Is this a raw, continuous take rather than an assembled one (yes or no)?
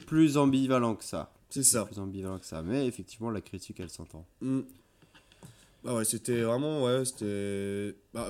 yes